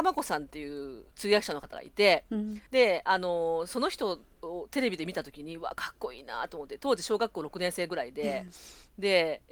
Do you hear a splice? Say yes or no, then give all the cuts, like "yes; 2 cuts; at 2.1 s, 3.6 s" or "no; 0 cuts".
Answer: yes; 2 cuts; at 1.1 s, 2.7 s